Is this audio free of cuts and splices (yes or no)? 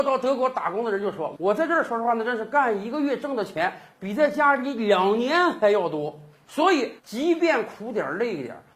no